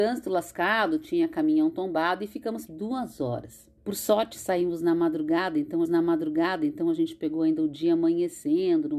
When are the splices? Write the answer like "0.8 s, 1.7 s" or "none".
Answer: 2.7 s, 3.8 s, 5.8 s